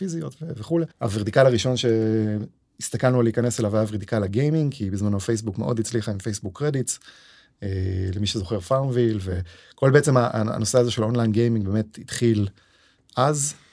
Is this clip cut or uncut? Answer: cut